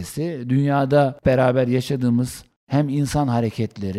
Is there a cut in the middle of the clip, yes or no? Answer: yes